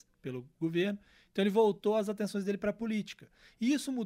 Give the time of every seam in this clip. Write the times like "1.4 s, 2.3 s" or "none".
none